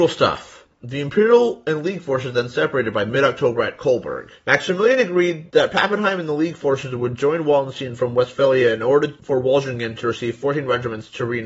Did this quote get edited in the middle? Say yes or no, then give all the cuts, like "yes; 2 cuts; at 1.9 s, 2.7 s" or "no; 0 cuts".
no; 0 cuts